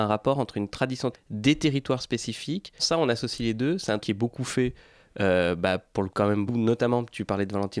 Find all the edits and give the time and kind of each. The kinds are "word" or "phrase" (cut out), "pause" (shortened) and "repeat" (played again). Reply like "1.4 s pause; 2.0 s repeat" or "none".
1.1 s word; 2.8 s word; 4.0 s word; 6.1 s word; 6.5 s word